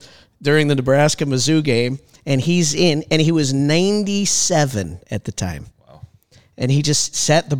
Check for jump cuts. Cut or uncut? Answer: uncut